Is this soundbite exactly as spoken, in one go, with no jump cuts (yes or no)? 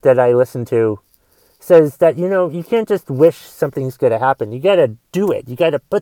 yes